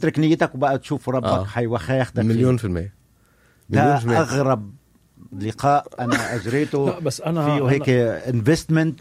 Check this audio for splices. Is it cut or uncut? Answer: uncut